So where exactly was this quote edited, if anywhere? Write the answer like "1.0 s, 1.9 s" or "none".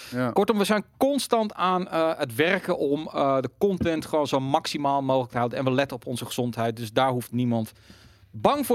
none

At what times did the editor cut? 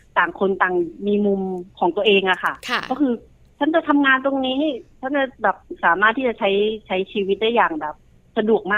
none

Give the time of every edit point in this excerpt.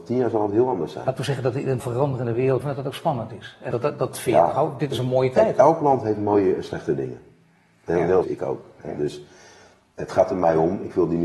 1.8 s, 2.6 s, 3.7 s, 8.2 s

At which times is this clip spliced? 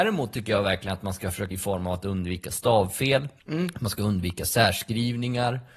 1.5 s, 3.4 s

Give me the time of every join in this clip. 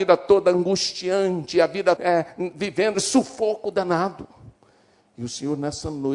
2.0 s, 2.9 s

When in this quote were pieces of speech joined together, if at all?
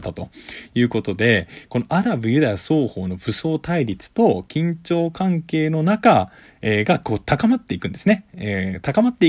none

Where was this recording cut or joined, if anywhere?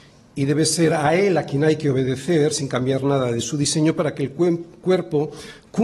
none

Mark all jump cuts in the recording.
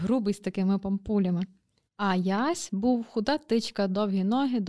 none

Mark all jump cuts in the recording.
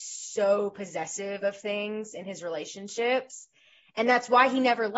none

